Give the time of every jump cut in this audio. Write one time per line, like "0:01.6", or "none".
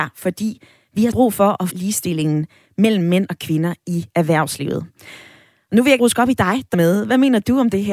0:01.1
0:01.7
0:06.0
0:06.7